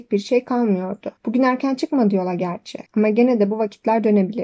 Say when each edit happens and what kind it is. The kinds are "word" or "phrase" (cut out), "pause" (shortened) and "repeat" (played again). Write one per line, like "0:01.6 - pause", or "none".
0:01.2 - pause
0:02.9 - pause